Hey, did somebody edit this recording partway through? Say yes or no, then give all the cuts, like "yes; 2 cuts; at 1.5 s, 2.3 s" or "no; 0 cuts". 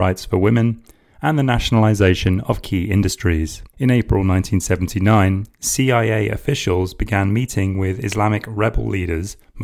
yes; 1 cut; at 3.7 s